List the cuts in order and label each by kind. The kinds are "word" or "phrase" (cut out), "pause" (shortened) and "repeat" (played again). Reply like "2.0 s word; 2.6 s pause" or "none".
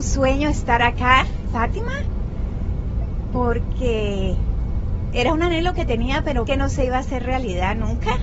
1.4 s word; 6.5 s word